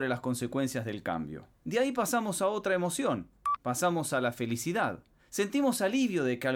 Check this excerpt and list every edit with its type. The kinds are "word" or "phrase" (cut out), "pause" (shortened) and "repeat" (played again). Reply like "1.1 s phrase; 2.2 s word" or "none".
1.5 s pause; 5.2 s pause